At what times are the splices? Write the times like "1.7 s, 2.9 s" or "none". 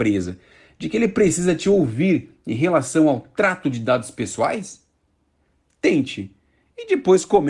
none